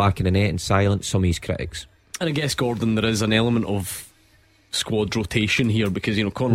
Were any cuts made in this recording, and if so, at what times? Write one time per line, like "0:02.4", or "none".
none